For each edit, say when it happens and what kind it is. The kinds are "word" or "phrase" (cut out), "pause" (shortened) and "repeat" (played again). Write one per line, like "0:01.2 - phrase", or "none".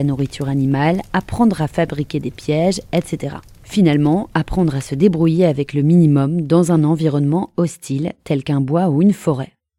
none